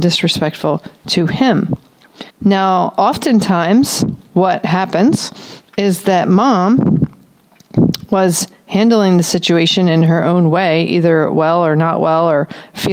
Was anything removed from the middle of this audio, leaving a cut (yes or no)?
yes